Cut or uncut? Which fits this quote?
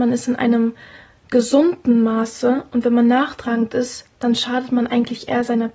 uncut